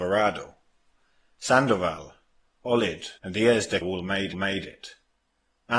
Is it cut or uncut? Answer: cut